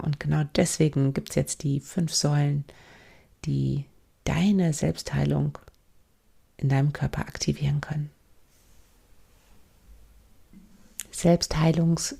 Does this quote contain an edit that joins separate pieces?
no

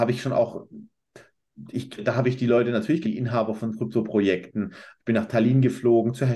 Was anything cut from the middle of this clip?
yes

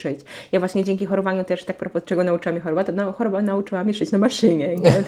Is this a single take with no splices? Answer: yes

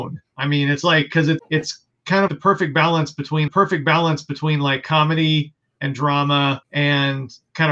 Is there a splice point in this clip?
yes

